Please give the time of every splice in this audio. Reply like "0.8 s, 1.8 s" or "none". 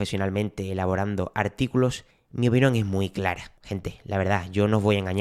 2.1 s, 3.6 s